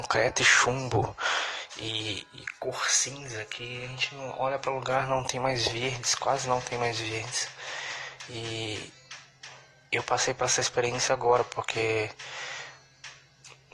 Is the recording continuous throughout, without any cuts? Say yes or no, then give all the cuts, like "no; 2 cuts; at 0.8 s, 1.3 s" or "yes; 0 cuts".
yes; 0 cuts